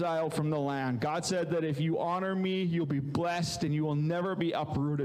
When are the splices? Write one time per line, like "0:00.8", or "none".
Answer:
none

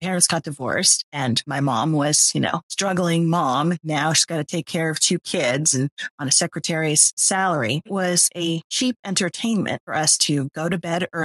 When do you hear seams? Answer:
0:07.1

